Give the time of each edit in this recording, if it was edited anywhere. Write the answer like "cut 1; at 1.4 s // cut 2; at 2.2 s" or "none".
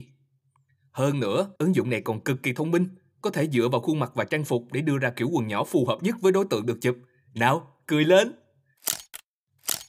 cut 1; at 1.6 s